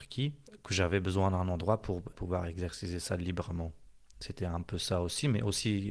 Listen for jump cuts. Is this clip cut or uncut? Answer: cut